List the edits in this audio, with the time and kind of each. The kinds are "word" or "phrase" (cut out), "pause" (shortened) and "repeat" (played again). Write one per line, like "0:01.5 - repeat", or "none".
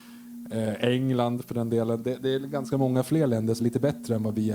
0:03.6 - word